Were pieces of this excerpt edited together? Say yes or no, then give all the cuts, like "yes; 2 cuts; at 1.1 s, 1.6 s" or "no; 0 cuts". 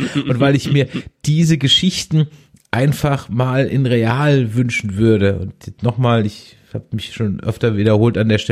no; 0 cuts